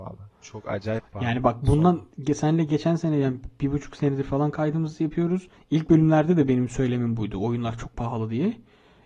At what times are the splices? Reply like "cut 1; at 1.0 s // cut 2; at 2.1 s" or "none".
cut 1; at 5.5 s

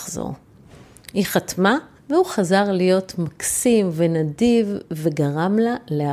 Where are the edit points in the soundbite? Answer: cut 1; at 2.0 s

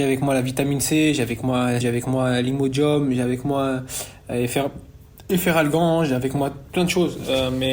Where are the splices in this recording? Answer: cut 1; at 1.8 s

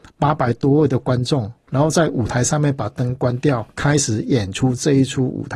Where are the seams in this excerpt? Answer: cut 1; at 3.7 s

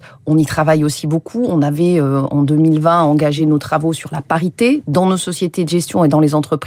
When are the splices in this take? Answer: none

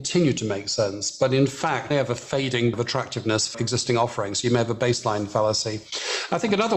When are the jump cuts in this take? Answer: cut 1; at 1.9 s // cut 2; at 2.7 s // cut 3; at 3.5 s

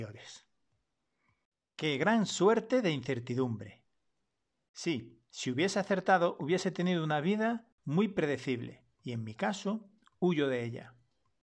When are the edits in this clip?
cut 1; at 5.3 s // cut 2; at 8.9 s

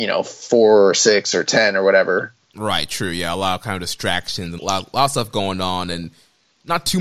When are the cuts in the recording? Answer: cut 1; at 4.6 s

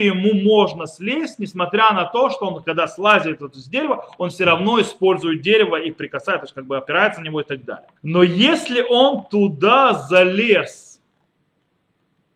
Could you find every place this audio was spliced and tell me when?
cut 1; at 8.0 s

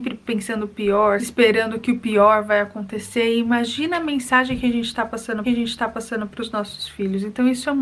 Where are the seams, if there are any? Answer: cut 1; at 5.4 s

